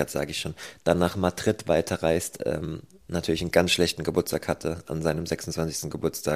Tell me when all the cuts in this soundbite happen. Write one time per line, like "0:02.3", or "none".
none